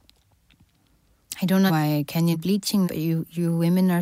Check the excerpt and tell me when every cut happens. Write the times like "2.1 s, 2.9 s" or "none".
1.7 s, 2.3 s, 2.8 s